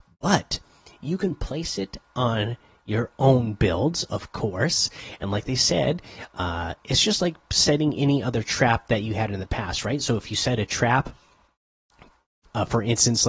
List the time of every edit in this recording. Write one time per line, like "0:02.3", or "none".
none